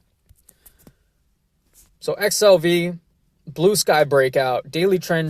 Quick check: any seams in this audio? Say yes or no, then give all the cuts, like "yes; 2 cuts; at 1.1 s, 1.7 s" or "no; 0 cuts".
no; 0 cuts